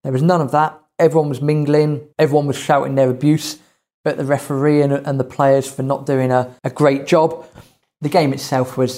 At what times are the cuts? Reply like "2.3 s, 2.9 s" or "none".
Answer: 2.1 s, 6.6 s